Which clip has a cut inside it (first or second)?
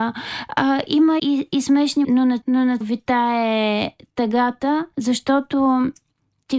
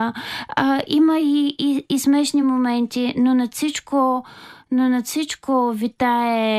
first